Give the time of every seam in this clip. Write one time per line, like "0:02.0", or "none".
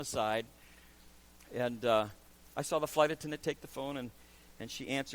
none